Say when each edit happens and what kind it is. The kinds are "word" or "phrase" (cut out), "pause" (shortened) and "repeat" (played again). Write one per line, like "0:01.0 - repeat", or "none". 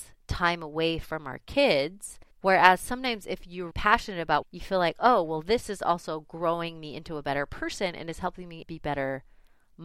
0:02.3 - pause
0:03.7 - word
0:04.4 - phrase